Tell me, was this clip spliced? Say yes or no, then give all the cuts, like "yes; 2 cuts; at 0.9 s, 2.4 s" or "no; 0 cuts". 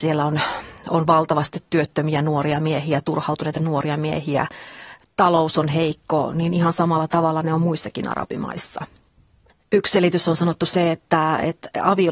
no; 0 cuts